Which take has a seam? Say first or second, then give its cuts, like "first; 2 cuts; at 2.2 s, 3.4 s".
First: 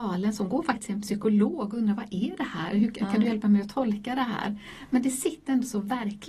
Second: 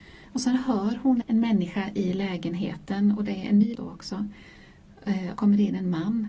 second; 3 cuts; at 1.2 s, 3.8 s, 5.4 s